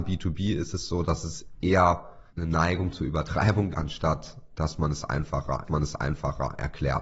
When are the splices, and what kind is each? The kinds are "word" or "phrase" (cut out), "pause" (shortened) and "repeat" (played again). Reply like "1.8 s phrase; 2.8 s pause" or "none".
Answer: 2.3 s pause; 3.7 s word; 5.6 s repeat